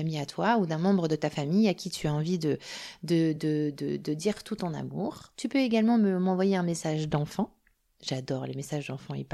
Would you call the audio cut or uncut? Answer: uncut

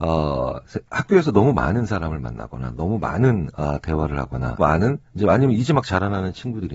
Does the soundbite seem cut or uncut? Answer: cut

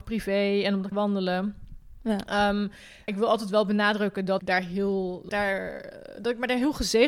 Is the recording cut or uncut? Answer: cut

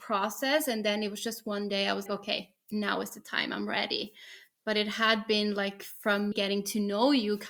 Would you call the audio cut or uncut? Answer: cut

